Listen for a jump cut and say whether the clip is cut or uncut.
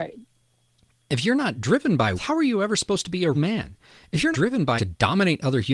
cut